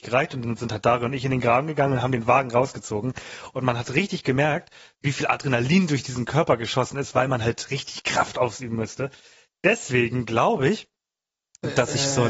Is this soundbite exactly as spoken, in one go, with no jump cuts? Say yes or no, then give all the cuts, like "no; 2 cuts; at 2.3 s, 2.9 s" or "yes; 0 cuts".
yes; 0 cuts